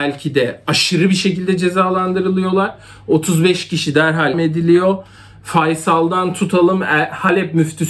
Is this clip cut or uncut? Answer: cut